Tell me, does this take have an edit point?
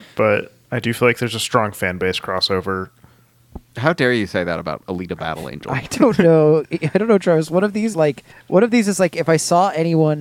yes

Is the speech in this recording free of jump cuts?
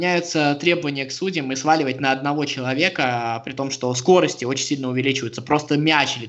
yes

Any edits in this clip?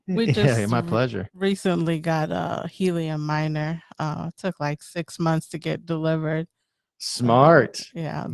no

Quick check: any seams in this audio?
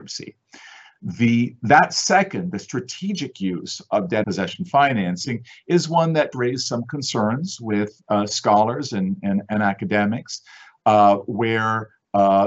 yes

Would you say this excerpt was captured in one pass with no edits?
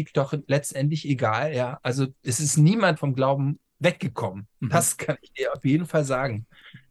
no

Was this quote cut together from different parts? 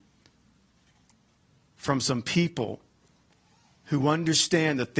no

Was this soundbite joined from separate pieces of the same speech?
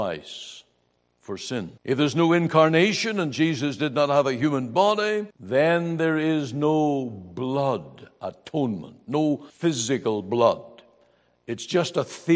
yes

